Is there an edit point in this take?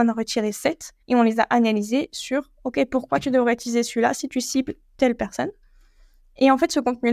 yes; 1 cut; at 1.0 s

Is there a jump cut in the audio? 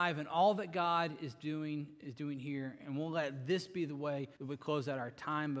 yes; 1 cut; at 4.4 s

